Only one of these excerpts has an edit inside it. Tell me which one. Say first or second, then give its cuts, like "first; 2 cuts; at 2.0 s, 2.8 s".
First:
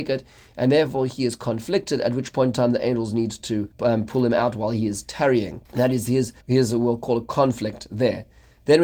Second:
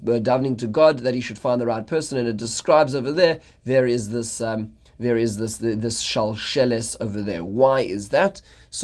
first; 3 cuts; at 3.7 s, 5.7 s, 6.4 s